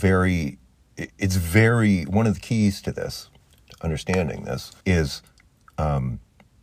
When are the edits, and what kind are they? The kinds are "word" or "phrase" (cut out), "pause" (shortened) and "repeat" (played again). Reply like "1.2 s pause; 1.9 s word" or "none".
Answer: 4.8 s pause